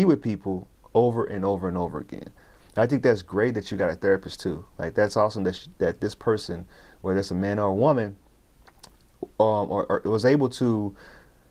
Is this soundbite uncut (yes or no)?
yes